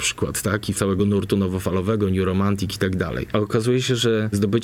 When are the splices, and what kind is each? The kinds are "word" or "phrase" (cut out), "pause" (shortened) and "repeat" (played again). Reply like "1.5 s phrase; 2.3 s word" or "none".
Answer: none